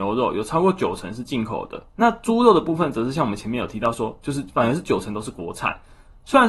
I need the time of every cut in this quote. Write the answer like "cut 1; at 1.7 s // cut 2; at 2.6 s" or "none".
cut 1; at 1.9 s

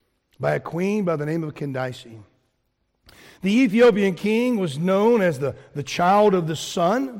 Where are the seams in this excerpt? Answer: none

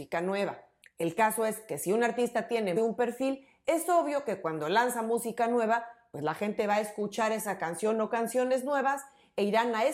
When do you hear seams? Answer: cut 1; at 2.8 s

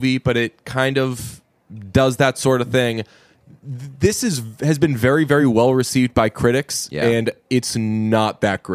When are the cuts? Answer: none

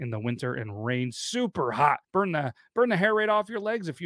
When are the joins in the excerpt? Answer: cut 1; at 2.0 s

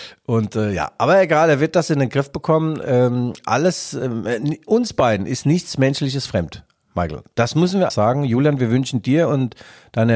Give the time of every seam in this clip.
cut 1; at 7.9 s

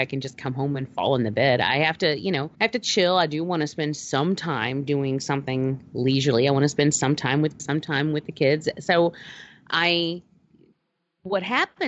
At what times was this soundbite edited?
cut 1; at 2.5 s // cut 2; at 7.6 s

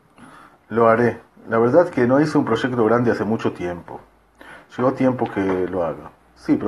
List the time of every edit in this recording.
none

